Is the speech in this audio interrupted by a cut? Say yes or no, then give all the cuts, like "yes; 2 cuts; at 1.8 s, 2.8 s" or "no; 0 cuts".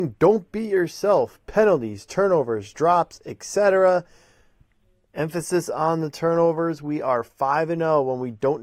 no; 0 cuts